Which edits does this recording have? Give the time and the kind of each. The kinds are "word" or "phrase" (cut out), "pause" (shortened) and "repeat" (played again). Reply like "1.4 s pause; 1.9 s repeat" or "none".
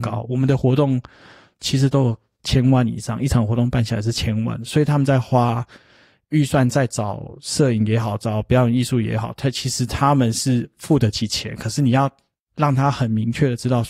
1.5 s word